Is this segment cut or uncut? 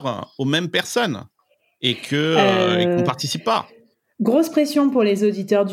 uncut